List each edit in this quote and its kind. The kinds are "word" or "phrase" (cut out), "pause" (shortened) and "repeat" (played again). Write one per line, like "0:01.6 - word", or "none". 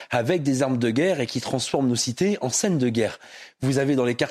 none